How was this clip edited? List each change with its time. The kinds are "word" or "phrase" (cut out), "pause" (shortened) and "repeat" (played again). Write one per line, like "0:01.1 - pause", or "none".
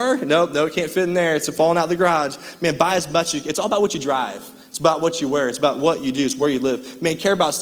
none

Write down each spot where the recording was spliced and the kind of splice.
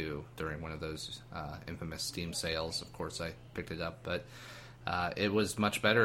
none

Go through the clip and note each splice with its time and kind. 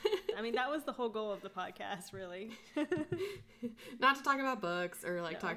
none

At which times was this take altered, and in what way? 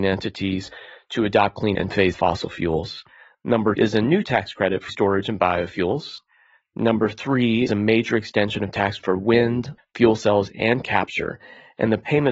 0:01.7 - word
0:02.1 - word
0:03.7 - word
0:04.9 - word
0:07.7 - word
0:09.0 - word
0:09.8 - word
0:10.8 - word

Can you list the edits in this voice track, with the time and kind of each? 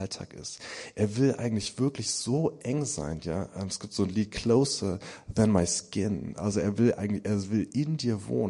none

